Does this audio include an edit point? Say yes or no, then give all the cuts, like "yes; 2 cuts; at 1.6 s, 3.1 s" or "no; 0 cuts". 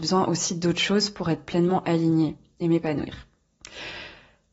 no; 0 cuts